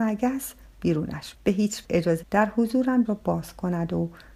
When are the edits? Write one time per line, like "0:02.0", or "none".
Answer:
0:01.3
0:01.8
0:02.2
0:03.0